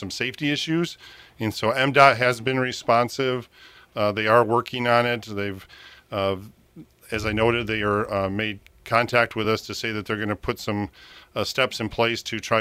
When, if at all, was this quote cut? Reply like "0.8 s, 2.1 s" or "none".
none